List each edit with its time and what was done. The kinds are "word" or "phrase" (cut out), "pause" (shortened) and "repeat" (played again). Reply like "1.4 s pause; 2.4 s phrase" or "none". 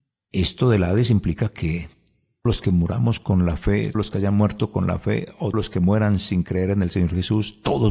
2.5 s word; 3.9 s word; 5.5 s word